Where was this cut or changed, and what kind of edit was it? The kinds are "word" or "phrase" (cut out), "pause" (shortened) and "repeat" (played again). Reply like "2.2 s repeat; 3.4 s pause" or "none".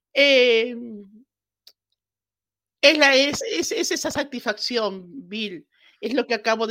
none